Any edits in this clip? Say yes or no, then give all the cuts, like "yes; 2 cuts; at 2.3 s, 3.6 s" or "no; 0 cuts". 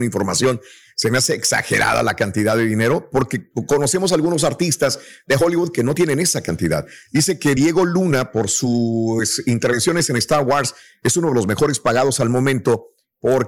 no; 0 cuts